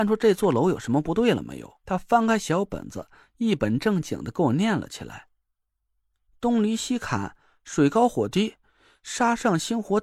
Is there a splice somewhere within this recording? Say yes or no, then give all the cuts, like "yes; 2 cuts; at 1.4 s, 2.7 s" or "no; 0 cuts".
yes; 2 cuts; at 1.8 s, 5.4 s